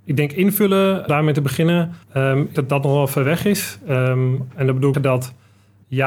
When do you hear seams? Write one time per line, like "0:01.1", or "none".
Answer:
0:01.1
0:02.0
0:02.5
0:04.9